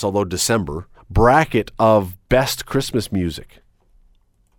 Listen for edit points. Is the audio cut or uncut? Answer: cut